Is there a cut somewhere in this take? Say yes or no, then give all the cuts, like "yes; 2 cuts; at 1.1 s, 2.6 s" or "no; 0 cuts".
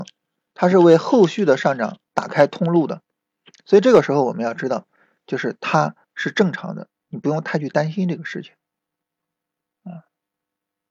yes; 1 cut; at 6.0 s